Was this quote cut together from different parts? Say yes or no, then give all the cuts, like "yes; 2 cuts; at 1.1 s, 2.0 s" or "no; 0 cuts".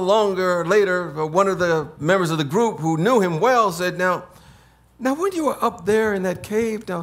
no; 0 cuts